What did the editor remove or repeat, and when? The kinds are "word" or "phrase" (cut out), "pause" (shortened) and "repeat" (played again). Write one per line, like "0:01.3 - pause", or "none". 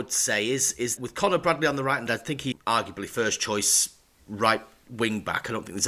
0:01.0 - word
0:02.1 - word
0:02.5 - word